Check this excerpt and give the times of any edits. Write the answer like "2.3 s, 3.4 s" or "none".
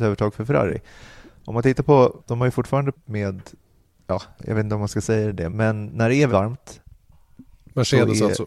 2.2 s, 2.9 s, 4.4 s, 5.5 s, 6.3 s